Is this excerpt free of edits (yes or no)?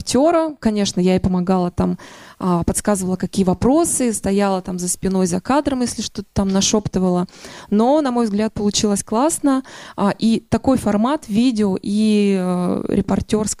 yes